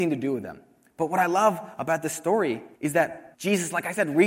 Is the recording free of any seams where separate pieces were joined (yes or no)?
no